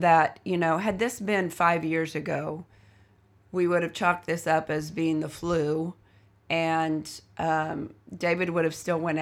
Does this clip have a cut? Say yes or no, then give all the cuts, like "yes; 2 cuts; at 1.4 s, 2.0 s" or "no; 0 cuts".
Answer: no; 0 cuts